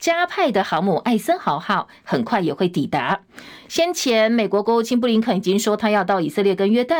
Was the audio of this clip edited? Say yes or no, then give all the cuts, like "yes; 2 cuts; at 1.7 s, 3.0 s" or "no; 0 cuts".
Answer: no; 0 cuts